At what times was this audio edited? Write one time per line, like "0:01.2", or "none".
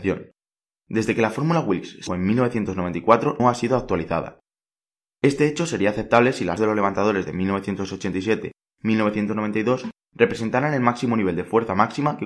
0:02.1
0:03.4
0:06.6